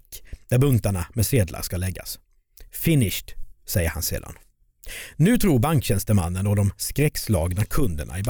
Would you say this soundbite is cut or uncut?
uncut